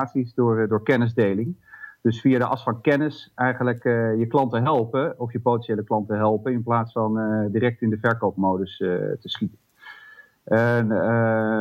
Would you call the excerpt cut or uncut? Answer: uncut